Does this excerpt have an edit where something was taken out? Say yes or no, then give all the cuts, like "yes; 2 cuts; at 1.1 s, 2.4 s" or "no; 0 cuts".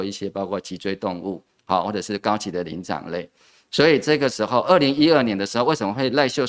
no; 0 cuts